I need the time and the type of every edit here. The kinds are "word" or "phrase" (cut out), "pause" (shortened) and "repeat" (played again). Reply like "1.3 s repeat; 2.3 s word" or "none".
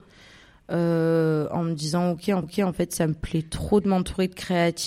2.4 s repeat